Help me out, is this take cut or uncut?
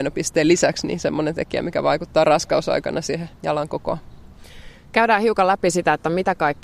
cut